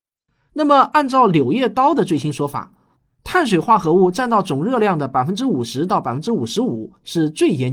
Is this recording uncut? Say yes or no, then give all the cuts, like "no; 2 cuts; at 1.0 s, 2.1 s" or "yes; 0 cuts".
yes; 0 cuts